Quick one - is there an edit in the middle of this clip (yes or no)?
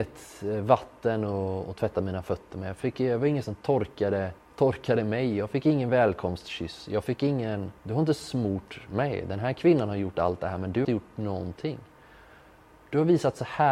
yes